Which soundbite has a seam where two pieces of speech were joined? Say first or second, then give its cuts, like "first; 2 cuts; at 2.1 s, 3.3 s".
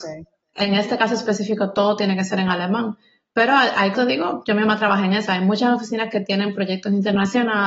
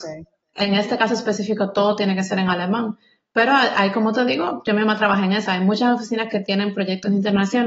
first; 1 cut; at 3.9 s